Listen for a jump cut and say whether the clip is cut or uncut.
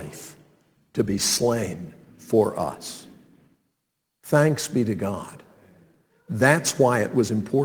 uncut